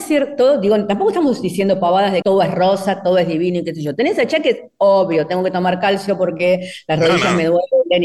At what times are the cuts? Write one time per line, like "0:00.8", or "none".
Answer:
0:02.2